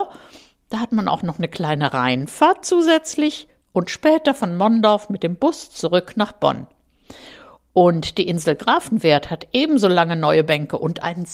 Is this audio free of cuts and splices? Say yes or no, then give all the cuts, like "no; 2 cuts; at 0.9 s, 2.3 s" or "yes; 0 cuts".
yes; 0 cuts